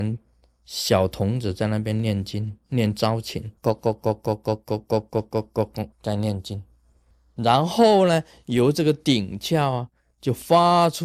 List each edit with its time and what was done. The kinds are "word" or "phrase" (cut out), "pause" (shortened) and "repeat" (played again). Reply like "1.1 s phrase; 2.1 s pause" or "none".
3.6 s pause; 5.9 s pause